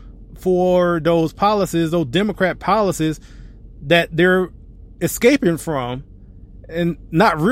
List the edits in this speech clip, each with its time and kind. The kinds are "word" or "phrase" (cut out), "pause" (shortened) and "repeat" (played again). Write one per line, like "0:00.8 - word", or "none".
none